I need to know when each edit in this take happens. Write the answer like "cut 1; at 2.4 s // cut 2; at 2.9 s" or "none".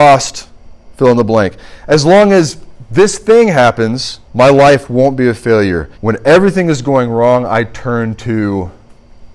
cut 1; at 4.3 s // cut 2; at 5.9 s